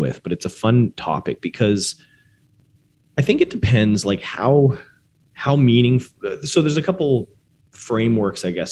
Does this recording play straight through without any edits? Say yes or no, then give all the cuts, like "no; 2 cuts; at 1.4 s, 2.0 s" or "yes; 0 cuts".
yes; 0 cuts